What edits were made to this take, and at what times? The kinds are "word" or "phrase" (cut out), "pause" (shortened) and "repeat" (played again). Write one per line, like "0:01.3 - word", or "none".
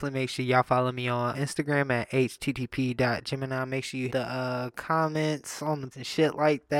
0:01.3 - word
0:04.1 - word
0:05.9 - word